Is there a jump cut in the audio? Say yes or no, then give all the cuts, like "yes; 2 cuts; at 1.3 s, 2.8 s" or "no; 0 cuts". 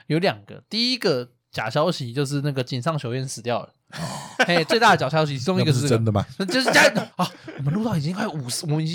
yes; 1 cut; at 7.1 s